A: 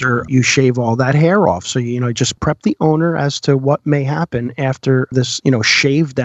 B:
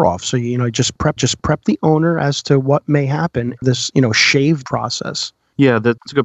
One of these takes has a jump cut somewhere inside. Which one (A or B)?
B